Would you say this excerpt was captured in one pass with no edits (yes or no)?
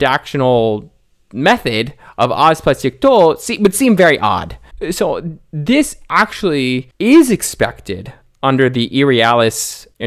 yes